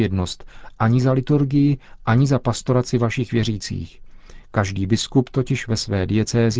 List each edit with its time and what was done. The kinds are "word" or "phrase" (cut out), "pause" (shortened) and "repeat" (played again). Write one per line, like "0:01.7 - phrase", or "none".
none